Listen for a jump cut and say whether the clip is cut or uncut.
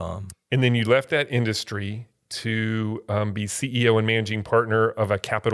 uncut